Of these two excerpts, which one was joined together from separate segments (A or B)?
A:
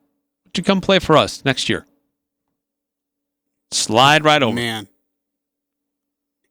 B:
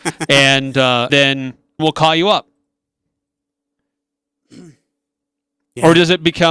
B